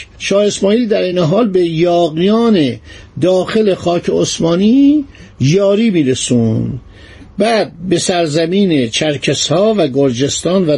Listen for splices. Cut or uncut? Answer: uncut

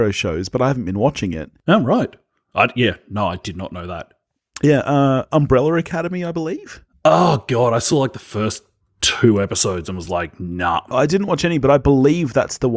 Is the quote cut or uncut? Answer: uncut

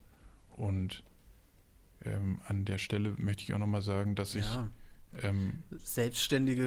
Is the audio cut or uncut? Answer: uncut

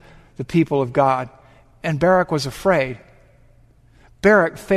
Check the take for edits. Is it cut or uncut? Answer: uncut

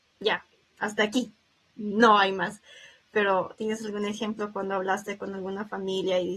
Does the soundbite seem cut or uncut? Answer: uncut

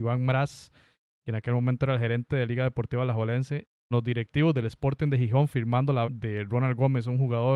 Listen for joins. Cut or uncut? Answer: cut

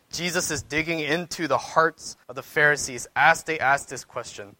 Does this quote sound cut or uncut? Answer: cut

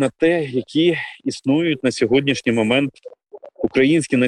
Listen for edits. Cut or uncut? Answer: uncut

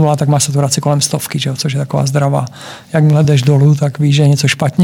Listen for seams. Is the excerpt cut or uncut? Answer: uncut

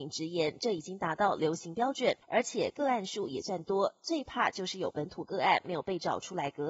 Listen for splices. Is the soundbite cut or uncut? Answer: cut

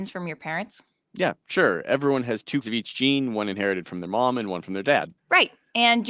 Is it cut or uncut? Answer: cut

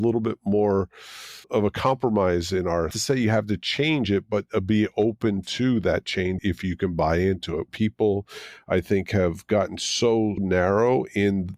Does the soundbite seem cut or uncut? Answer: cut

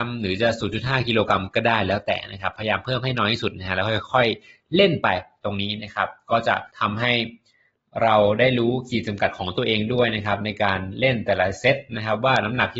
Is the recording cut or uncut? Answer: cut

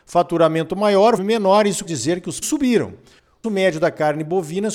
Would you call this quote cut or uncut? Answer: cut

